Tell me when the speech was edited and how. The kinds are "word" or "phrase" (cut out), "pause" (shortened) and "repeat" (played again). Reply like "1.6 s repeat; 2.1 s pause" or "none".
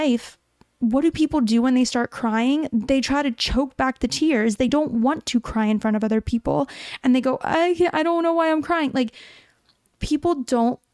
none

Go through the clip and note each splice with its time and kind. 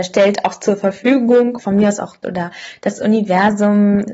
1.6 s word; 2.2 s word

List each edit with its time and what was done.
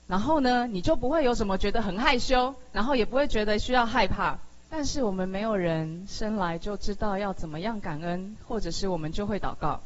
4.6 s pause

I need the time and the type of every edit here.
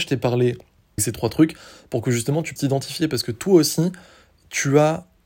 1.0 s phrase; 2.6 s word

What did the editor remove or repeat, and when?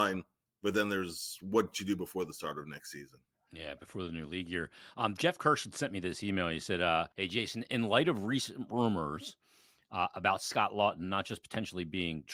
7.1 s pause

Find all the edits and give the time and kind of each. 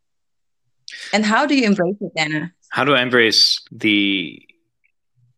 2.6 s pause; 3.6 s pause

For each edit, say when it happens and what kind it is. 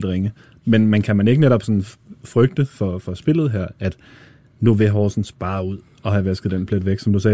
none

